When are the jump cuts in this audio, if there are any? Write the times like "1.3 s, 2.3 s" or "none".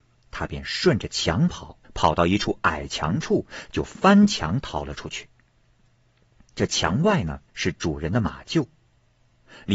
1.8 s, 7.5 s

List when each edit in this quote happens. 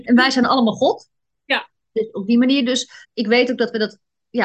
3.0 s

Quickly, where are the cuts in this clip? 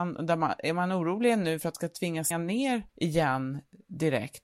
1.7 s, 2.3 s, 2.9 s

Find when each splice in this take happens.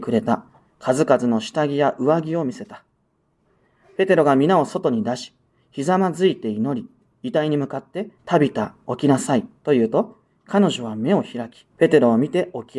8.1 s, 9.6 s, 11.7 s

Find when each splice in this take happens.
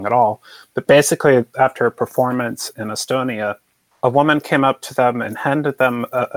none

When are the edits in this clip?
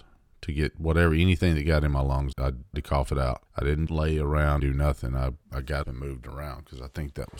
2.3 s, 2.7 s, 3.5 s, 3.9 s, 4.6 s, 5.4 s, 5.8 s

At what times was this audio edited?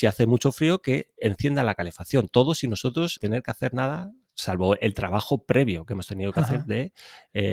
3.2 s

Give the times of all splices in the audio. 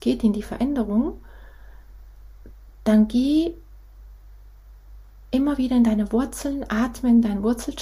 none

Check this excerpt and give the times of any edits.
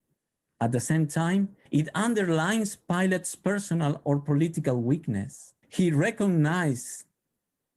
1.7 s, 5.6 s

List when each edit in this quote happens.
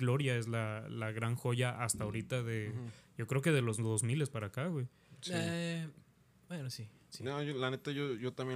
none

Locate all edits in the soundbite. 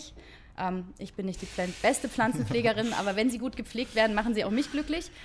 none

